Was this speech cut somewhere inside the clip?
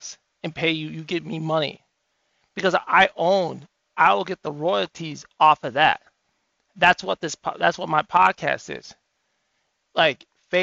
no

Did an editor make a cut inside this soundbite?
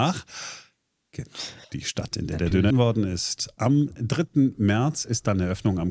yes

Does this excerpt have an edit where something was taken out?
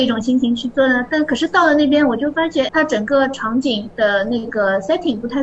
yes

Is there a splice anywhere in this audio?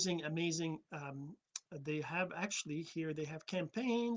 no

